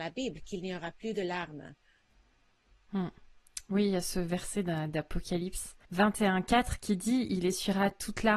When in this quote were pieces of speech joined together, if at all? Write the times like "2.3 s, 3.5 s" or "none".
5.8 s

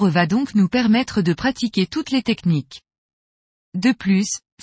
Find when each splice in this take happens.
none

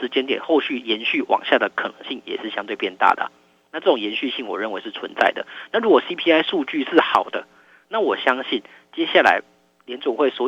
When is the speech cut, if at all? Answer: none

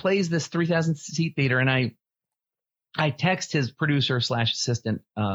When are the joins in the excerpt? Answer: none

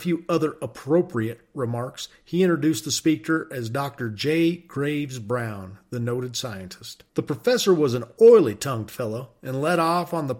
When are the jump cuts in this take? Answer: 7.1 s

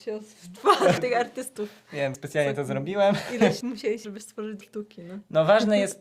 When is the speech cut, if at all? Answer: 1.0 s, 2.1 s, 3.6 s, 4.0 s, 4.6 s

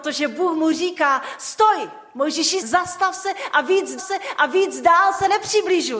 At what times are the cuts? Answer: 2.6 s, 4.0 s

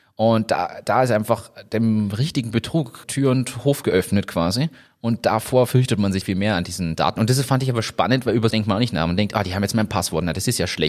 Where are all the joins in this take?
3.0 s, 6.2 s, 8.5 s

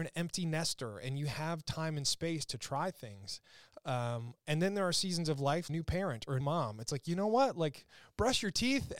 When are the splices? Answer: 5.7 s, 6.4 s

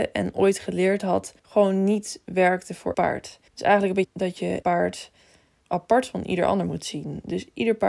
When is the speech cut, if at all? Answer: 1.4 s, 2.9 s, 3.5 s, 4.0 s, 4.6 s, 5.7 s

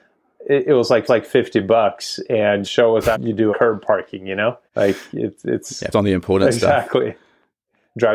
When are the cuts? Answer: 1.1 s, 2.6 s, 3.1 s, 3.5 s, 4.7 s, 5.9 s

